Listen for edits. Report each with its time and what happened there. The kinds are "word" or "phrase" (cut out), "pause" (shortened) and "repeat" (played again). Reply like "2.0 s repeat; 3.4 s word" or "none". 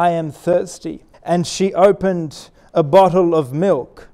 1.1 s pause